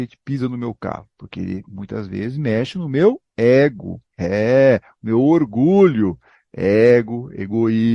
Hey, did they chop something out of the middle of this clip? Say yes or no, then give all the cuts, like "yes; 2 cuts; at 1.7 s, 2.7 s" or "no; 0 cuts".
no; 0 cuts